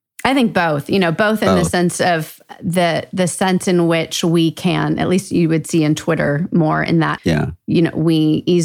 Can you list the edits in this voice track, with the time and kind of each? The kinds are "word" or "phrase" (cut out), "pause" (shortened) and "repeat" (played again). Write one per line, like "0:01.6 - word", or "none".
0:07.2 - phrase